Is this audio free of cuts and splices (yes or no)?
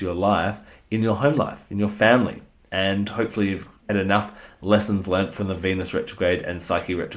no